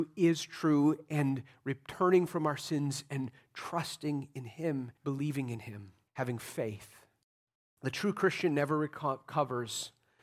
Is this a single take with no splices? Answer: no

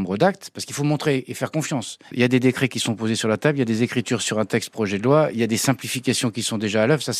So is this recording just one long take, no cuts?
yes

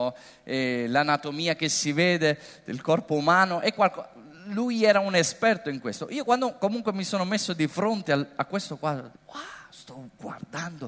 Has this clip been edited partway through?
yes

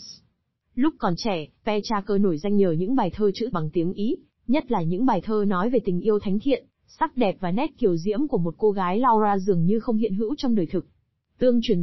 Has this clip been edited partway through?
yes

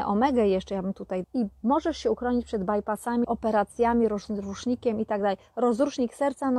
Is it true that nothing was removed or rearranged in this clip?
no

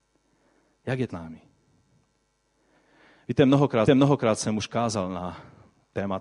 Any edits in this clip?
yes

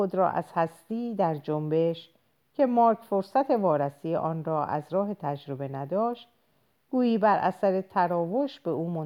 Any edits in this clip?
no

